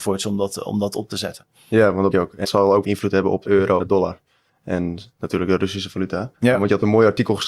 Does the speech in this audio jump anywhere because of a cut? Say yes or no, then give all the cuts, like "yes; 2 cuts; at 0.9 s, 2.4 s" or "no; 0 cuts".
yes; 7 cuts; at 2.1 s, 2.4 s, 2.8 s, 3.4 s, 3.8 s, 5.1 s, 6.3 s